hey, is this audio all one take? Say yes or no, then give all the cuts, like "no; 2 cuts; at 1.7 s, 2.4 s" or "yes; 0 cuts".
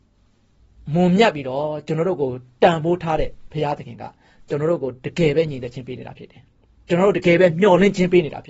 no; 1 cut; at 6.7 s